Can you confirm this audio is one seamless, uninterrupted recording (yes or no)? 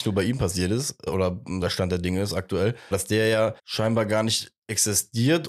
no